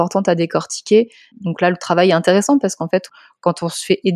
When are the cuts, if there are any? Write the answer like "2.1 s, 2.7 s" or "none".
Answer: none